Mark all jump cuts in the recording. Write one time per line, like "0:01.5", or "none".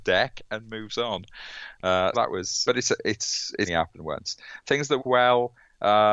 0:02.1
0:02.7
0:03.7
0:05.0